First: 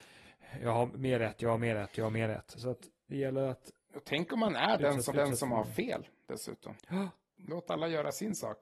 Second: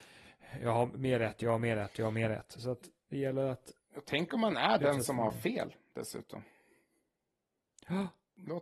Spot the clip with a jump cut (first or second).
first